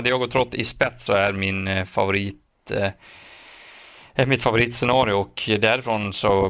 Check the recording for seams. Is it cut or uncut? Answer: cut